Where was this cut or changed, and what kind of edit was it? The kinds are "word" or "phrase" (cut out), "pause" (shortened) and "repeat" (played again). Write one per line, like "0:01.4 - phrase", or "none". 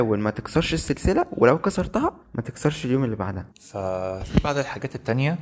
0:02.2 - pause
0:03.5 - pause